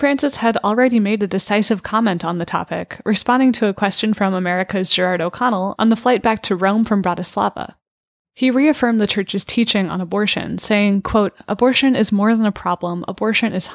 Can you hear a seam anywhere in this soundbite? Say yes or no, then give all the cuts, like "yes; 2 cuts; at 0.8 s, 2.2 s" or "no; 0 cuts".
no; 0 cuts